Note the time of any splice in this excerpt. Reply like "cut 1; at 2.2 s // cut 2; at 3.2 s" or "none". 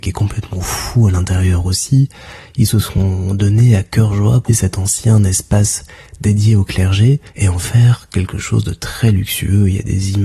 cut 1; at 4.5 s // cut 2; at 7.3 s